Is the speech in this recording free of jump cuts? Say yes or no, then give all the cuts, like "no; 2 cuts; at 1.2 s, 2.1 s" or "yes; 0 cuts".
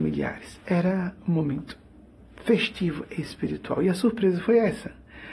yes; 0 cuts